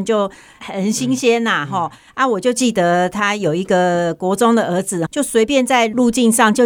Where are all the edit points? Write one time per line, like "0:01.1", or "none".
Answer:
0:05.1